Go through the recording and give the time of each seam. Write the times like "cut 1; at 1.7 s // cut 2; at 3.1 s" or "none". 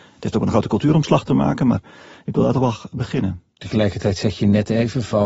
none